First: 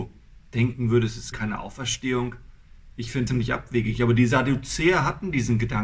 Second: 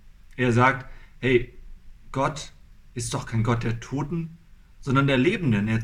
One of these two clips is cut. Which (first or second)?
first